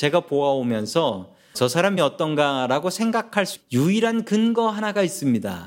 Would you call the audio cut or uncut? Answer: cut